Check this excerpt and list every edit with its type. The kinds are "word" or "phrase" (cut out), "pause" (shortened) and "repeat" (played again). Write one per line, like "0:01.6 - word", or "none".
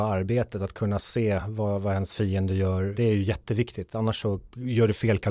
none